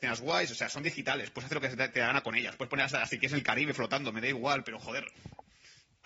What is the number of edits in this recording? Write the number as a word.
zero